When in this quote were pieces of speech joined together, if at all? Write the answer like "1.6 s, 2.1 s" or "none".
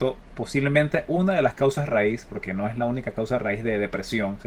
none

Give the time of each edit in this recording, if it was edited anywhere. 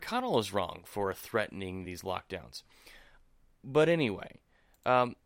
none

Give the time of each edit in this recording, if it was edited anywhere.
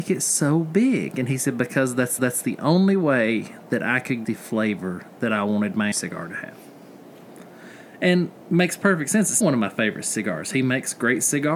2.2 s, 4.2 s, 5.9 s, 9.4 s

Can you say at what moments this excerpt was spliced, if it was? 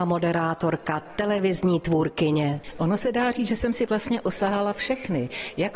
none

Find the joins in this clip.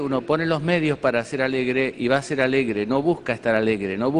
none

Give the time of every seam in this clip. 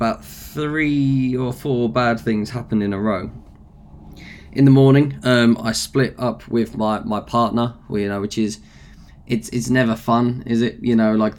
none

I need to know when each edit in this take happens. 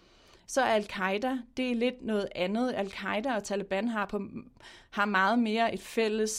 none

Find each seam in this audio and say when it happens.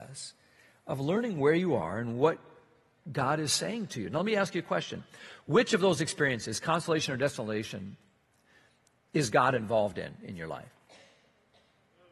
none

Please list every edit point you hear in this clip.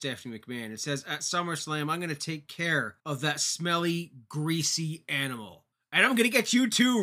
3.0 s, 5.7 s

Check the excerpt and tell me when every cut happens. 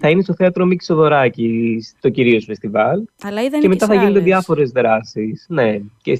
3.1 s

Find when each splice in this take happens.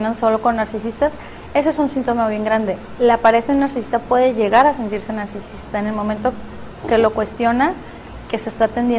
none

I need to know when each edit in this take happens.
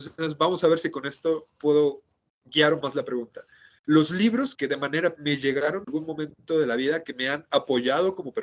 2.8 s, 4.5 s, 5.1 s, 5.8 s

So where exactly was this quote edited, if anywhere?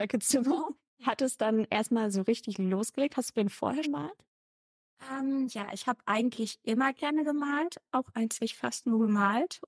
3.8 s, 8.4 s

